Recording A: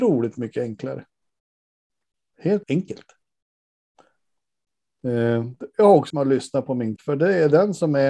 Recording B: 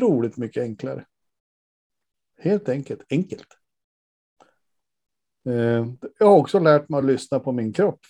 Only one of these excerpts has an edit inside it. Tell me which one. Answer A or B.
A